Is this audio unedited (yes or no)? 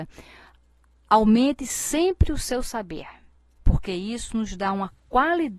yes